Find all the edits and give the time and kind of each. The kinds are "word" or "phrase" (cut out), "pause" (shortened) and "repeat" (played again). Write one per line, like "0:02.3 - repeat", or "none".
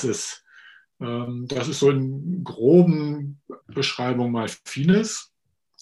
0:03.6 - pause